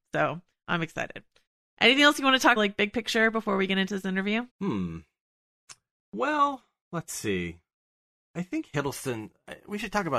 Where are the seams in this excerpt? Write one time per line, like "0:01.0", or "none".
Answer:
0:01.5
0:02.6
0:04.5